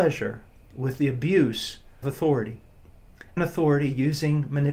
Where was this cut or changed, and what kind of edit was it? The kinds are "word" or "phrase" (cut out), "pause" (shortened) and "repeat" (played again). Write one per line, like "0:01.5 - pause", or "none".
0:02.0 - word
0:03.4 - word